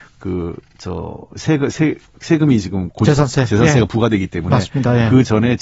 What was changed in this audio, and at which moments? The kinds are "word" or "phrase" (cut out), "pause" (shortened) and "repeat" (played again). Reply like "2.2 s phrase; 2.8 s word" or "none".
none